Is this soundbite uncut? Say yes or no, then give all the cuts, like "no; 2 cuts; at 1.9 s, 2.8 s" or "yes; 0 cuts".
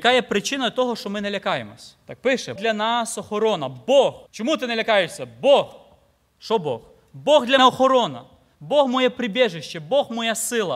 no; 4 cuts; at 2.0 s, 2.6 s, 4.3 s, 7.6 s